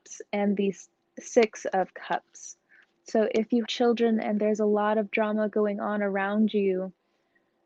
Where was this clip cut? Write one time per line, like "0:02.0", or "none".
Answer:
0:03.7

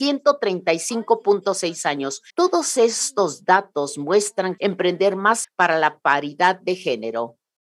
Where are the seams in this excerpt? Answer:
0:02.3
0:04.6
0:05.4

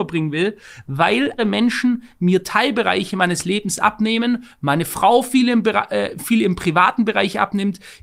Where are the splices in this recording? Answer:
0:01.4

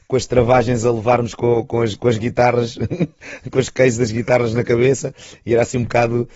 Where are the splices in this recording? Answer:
none

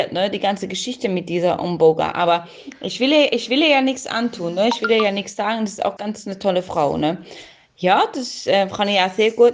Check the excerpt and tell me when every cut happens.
0:06.0

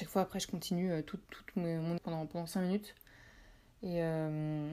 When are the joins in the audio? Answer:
0:01.3
0:02.0

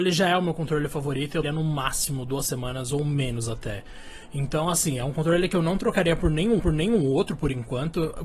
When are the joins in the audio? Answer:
0:01.4
0:06.6

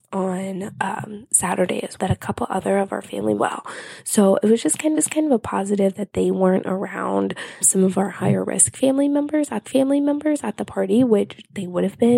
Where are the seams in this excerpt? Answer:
0:02.0
0:03.4
0:04.9
0:07.6
0:09.6

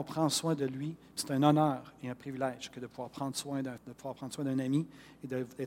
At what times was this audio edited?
0:03.8

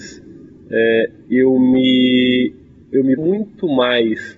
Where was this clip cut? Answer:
0:03.2

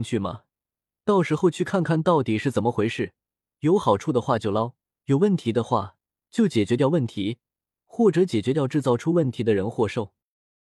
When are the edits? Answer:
0:04.8

